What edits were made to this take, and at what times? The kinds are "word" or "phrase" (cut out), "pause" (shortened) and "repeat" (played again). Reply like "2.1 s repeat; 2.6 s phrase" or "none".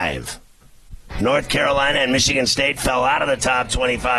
none